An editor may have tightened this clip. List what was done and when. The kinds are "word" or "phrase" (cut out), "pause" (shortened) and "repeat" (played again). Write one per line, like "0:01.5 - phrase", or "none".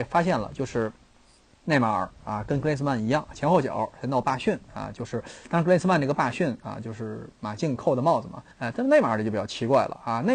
0:08.5 - pause